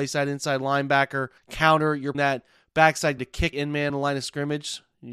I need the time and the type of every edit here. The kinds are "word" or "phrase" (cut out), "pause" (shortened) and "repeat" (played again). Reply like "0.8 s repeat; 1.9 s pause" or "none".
1.4 s pause; 2.1 s word; 3.2 s word; 3.5 s phrase; 3.9 s word